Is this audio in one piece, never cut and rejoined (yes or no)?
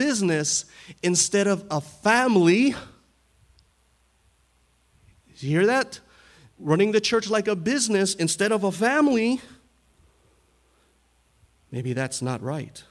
yes